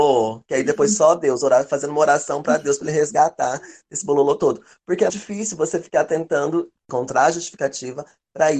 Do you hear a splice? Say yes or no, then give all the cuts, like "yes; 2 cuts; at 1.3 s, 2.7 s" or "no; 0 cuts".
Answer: yes; 2 cuts; at 5.1 s, 6.8 s